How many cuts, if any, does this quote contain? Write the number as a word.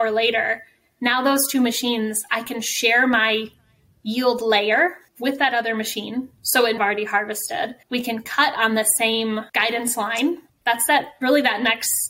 five